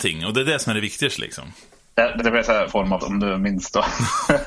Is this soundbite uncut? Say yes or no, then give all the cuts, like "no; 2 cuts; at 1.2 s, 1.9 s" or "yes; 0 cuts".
no; 3 cuts; at 2.2 s, 2.7 s, 3.0 s